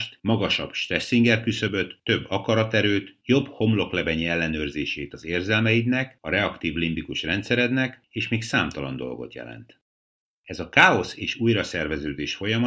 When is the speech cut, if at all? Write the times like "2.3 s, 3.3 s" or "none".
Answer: none